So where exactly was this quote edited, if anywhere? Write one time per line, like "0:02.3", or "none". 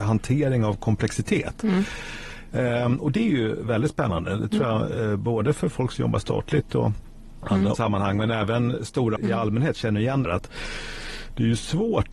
0:07.7
0:09.2
0:10.2